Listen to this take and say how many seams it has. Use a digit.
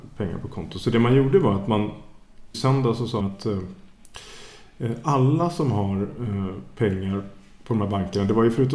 2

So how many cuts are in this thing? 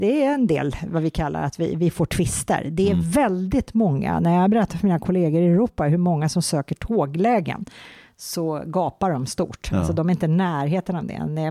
0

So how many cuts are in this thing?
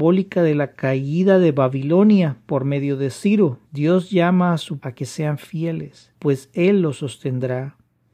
3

